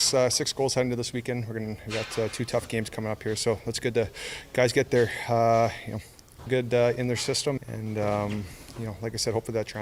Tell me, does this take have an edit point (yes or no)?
yes